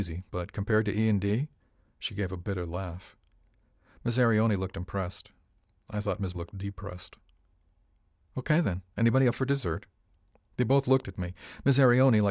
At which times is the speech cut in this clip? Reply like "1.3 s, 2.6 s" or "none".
6.3 s